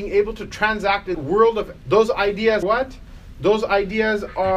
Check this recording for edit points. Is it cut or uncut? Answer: cut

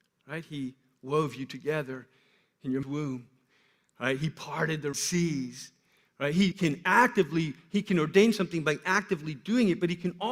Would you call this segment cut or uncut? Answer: cut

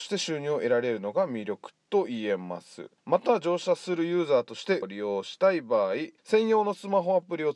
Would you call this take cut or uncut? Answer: cut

